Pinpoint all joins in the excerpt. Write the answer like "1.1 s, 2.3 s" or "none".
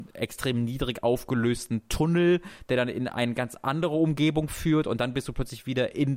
none